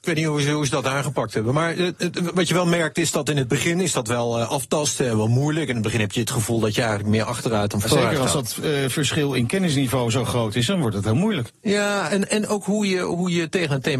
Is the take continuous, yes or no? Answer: yes